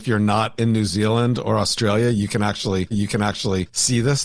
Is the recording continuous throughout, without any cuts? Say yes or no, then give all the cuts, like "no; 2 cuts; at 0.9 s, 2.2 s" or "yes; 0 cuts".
no; 1 cut; at 2.9 s